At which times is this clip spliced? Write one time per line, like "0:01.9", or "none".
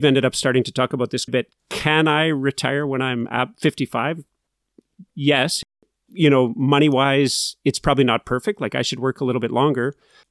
0:01.3
0:01.6
0:05.1